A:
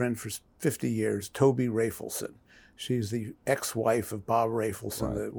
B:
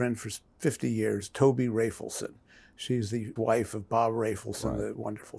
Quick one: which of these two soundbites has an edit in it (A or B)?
B